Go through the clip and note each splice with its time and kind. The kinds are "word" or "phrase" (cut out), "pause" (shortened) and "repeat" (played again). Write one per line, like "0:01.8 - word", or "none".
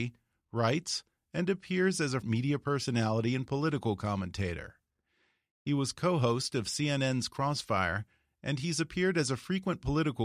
0:02.2 - word